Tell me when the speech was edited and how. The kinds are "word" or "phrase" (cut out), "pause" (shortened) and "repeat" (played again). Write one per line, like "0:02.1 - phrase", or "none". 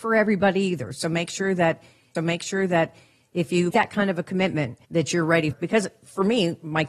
0:02.2 - repeat
0:03.7 - word
0:04.8 - pause
0:05.5 - word